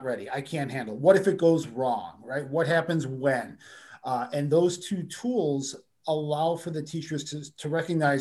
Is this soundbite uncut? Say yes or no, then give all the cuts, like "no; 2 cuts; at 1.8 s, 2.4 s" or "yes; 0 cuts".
yes; 0 cuts